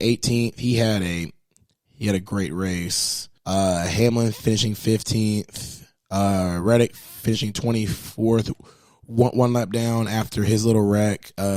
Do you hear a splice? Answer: yes; 1 cut; at 3.4 s

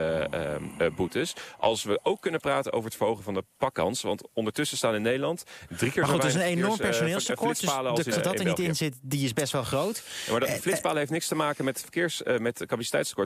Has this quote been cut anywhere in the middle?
yes; 1 cut; at 8.1 s

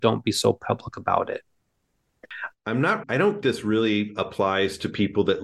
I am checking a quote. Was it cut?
yes; 2 cuts; at 3.0 s, 3.4 s

